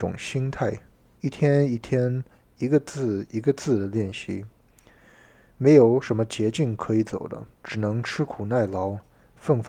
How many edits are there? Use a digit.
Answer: 1